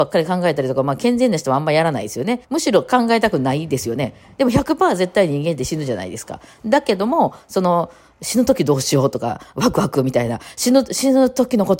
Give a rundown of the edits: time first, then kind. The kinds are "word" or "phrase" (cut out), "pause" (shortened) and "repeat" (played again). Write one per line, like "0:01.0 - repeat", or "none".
0:02.4 - pause

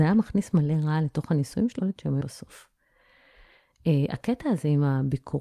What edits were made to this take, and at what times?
0:01.8 - word
0:02.2 - word

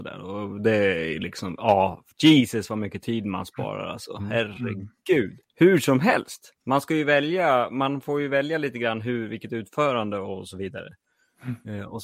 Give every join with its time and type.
0:02.1 - pause
0:05.4 - pause
0:06.6 - pause

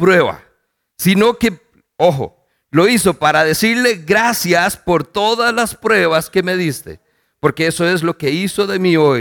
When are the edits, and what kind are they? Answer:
none

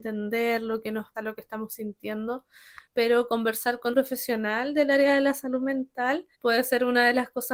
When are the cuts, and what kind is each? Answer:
0:01.1 - word
0:02.8 - pause
0:03.9 - word
0:06.3 - pause

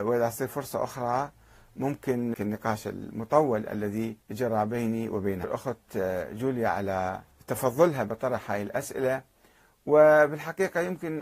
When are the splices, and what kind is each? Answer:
0:02.3 - phrase
0:04.2 - pause
0:05.4 - phrase
0:07.3 - pause

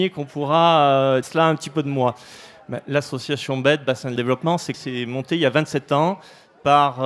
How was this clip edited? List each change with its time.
0:01.2 - word
0:04.2 - word
0:04.7 - word

